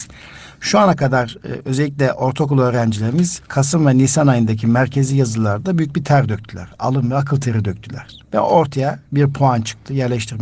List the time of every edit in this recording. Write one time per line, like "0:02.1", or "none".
0:08.3